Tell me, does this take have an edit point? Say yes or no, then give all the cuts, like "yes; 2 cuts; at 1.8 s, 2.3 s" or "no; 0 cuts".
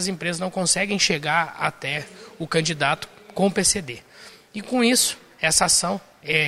no; 0 cuts